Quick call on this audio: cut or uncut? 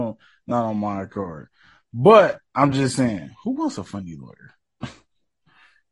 uncut